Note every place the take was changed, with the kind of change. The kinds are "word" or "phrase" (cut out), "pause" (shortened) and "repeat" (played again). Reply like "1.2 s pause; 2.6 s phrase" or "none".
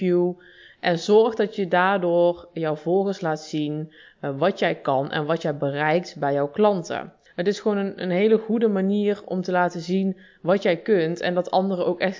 none